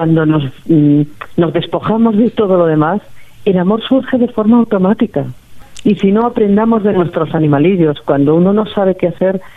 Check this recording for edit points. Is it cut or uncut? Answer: uncut